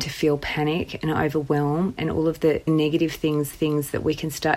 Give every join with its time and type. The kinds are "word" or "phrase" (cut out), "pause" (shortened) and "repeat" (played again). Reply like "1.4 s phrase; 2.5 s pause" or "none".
2.7 s word; 3.5 s repeat